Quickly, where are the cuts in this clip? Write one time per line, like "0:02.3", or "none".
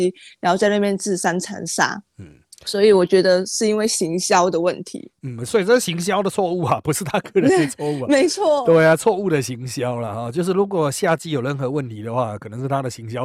0:02.1